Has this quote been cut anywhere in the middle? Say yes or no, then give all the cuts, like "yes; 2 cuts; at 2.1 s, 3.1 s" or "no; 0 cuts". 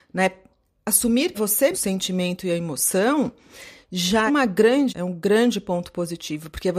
yes; 4 cuts; at 1.3 s, 1.7 s, 4.3 s, 4.9 s